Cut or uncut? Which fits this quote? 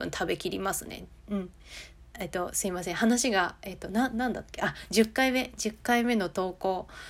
uncut